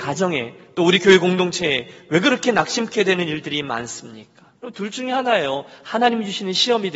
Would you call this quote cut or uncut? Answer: cut